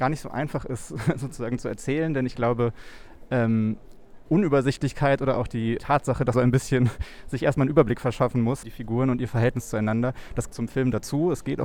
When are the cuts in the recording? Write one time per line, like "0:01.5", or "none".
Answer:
0:04.3
0:05.8
0:06.3
0:08.6
0:10.5

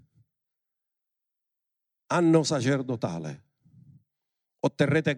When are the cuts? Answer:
none

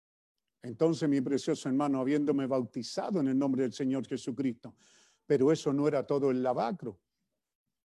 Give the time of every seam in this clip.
none

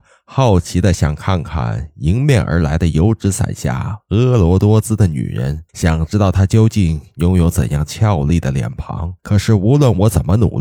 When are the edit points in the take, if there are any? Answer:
0:05.7
0:09.2

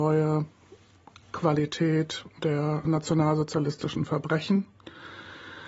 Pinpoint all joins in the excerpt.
none

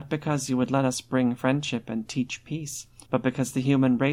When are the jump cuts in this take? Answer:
0:03.0

